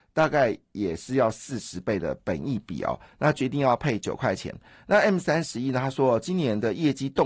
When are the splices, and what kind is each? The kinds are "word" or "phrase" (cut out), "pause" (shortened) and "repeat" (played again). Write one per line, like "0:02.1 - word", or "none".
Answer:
none